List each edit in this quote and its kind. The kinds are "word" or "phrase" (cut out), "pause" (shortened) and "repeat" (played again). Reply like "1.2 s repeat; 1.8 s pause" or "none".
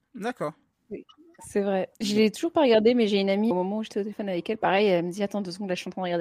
1.9 s pause; 3.5 s word